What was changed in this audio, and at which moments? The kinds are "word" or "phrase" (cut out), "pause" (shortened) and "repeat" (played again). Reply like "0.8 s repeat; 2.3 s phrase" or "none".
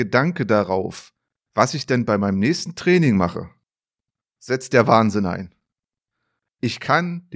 none

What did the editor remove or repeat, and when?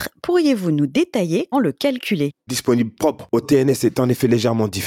1.5 s word; 2.5 s word

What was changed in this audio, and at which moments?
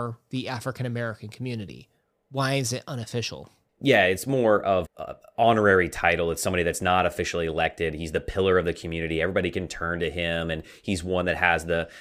4.8 s word

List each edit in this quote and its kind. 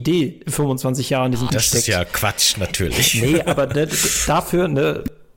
1.5 s word

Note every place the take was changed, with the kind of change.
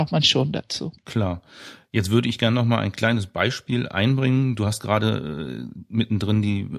1.0 s pause

